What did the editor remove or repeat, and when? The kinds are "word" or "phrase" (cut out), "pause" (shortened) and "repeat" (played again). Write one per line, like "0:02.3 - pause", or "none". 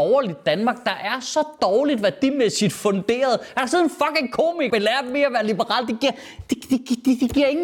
0:04.7 - word